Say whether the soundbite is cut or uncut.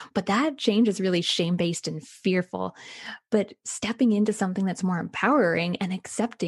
uncut